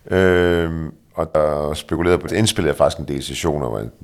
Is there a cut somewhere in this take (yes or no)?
yes